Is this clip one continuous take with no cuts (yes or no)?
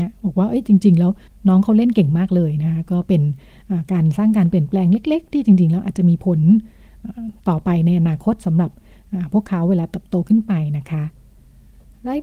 no